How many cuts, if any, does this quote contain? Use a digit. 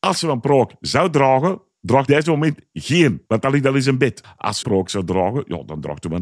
3